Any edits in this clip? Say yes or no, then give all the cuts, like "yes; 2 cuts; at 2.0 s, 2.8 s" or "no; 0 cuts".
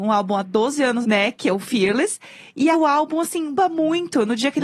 yes; 3 cuts; at 1.0 s, 2.7 s, 3.5 s